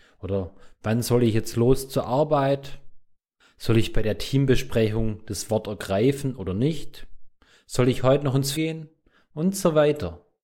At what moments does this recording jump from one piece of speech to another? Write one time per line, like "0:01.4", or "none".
0:08.5